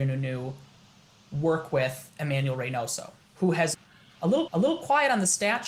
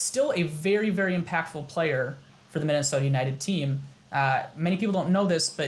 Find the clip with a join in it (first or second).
first